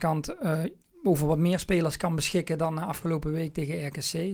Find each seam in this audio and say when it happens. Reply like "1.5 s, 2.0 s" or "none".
none